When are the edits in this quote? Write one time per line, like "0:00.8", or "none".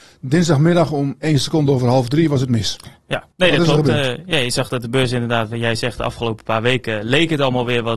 0:03.3